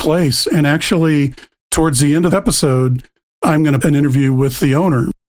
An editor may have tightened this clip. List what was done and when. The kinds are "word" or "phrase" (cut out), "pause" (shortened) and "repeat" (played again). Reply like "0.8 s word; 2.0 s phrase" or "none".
2.3 s word; 3.8 s word